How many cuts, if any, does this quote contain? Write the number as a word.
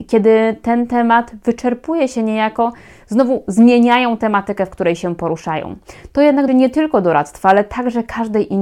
one